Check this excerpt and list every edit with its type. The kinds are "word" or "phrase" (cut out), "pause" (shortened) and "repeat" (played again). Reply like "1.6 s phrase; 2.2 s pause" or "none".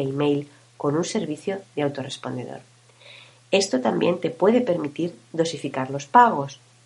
none